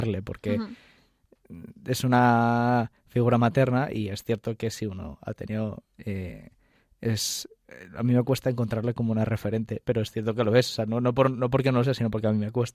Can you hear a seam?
no; 0 cuts

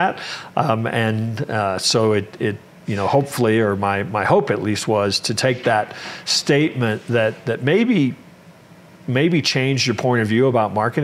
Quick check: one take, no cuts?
yes; 0 cuts

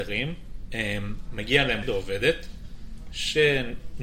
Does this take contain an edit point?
yes; 1 cut; at 1.8 s

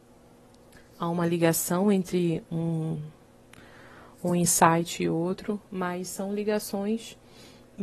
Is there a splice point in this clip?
no; 0 cuts

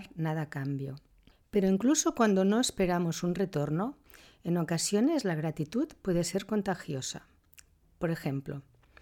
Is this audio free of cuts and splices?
yes; 0 cuts

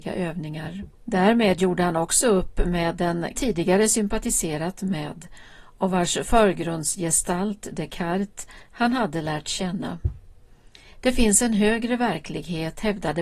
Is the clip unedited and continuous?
no; 3 cuts; at 0.9 s, 3.3 s, 8.6 s

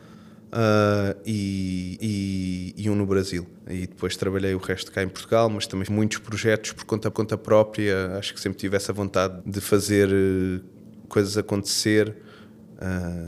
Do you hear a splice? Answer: yes; 5 cuts; at 2.0 s, 3.6 s, 5.9 s, 7.1 s, 9.4 s

